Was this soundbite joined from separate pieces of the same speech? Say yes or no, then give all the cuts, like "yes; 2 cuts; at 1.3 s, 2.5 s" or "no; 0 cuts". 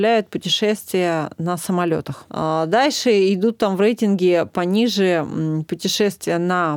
no; 0 cuts